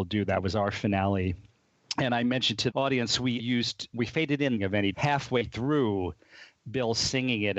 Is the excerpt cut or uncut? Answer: cut